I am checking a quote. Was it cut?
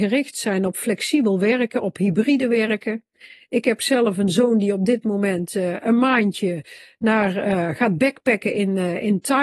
no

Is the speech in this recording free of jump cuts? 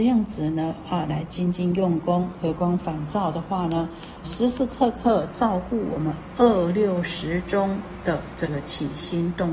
no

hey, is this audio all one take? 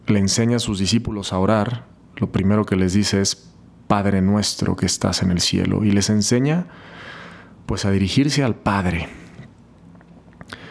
yes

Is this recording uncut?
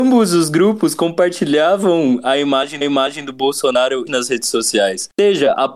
no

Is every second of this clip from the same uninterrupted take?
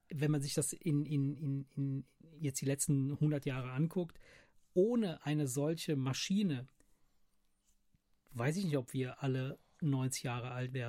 yes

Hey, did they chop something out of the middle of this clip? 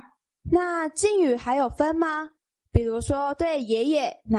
no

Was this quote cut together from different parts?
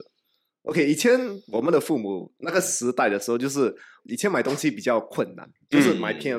yes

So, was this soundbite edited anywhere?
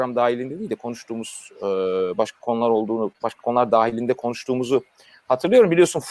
no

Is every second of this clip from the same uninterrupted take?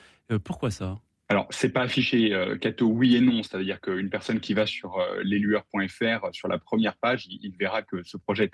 yes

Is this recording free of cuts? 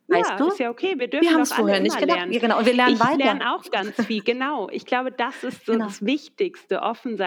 yes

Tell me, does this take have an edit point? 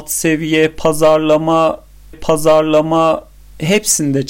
yes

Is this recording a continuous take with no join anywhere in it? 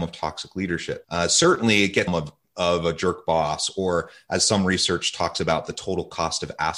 no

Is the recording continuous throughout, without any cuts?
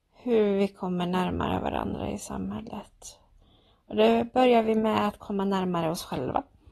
yes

